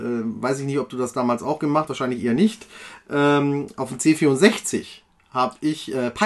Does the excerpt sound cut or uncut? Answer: cut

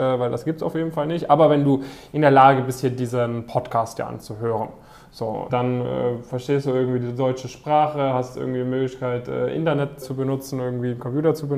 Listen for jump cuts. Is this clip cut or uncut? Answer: cut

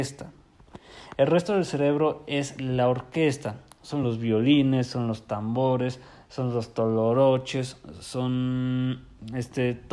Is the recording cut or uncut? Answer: uncut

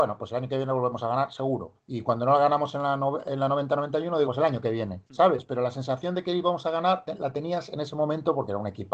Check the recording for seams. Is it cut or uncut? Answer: cut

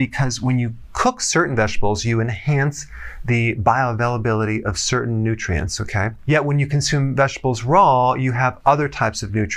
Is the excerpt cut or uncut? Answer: uncut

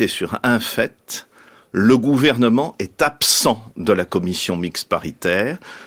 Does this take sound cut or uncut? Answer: uncut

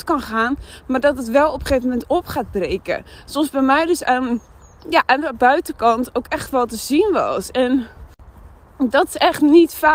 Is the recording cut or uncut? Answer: uncut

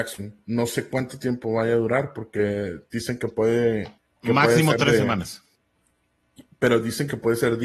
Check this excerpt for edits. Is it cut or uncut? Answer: cut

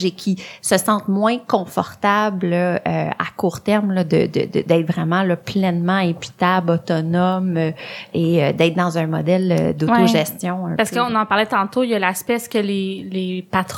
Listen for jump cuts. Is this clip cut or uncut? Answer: uncut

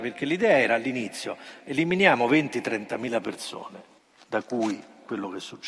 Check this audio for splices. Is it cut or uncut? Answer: cut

